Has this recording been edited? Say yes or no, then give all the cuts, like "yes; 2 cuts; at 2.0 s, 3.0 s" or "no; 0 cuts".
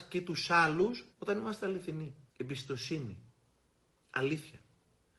yes; 2 cuts; at 1.1 s, 2.3 s